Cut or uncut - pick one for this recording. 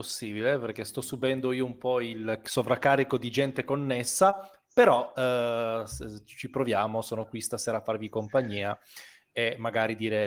uncut